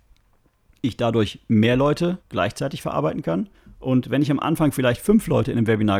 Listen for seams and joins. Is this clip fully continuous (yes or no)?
no